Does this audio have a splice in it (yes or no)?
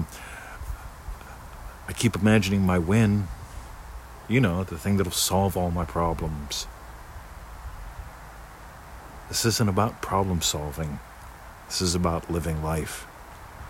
no